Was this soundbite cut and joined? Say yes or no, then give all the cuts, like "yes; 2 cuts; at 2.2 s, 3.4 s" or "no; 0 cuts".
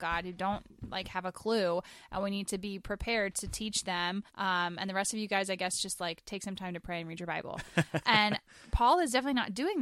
yes; 1 cut; at 4.3 s